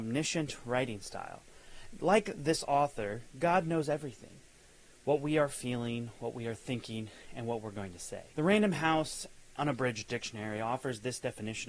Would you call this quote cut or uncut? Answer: cut